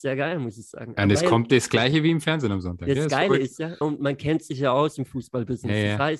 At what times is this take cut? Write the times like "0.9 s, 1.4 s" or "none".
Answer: 3.8 s